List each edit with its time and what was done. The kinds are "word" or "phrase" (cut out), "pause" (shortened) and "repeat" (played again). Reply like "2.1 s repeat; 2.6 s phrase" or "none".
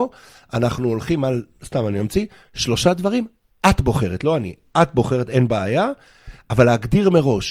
none